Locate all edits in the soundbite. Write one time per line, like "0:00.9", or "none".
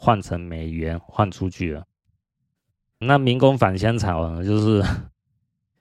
0:03.0